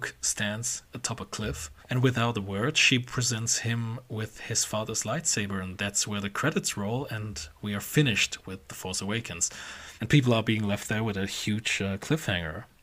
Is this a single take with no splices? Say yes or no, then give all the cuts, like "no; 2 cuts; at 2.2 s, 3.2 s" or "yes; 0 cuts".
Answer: no; 2 cuts; at 1.8 s, 10.0 s